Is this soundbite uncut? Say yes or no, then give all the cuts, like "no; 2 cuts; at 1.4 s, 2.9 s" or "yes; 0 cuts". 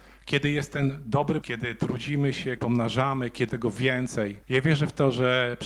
no; 4 cuts; at 1.4 s, 2.6 s, 3.5 s, 4.4 s